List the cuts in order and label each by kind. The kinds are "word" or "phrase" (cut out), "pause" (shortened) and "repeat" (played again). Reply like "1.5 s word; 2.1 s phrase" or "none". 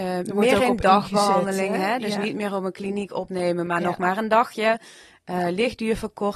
none